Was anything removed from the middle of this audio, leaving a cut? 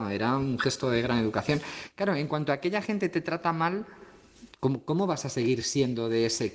no; 0 cuts

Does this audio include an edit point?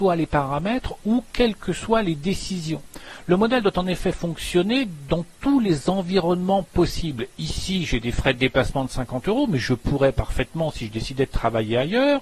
no; 0 cuts

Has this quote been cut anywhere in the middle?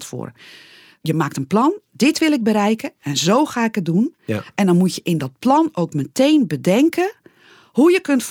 no; 0 cuts

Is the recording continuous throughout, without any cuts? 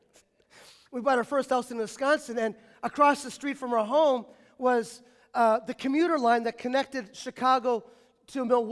yes; 0 cuts

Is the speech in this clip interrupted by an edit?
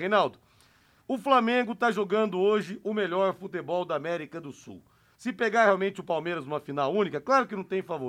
no; 0 cuts

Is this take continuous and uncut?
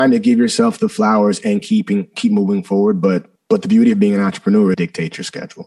no; 2 cuts; at 3.4 s, 4.7 s

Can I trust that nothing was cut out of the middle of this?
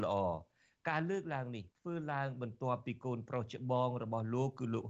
no; 1 cut; at 1.7 s

